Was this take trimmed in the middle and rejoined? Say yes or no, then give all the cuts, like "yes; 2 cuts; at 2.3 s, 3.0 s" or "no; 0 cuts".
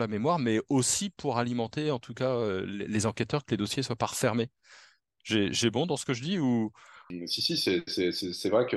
no; 0 cuts